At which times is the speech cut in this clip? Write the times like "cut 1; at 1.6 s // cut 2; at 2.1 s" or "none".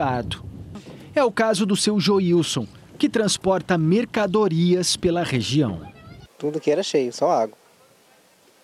none